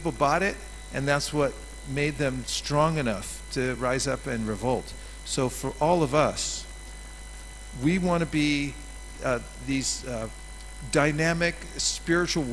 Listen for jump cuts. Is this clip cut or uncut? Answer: uncut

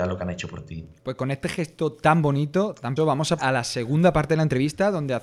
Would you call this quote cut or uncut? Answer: cut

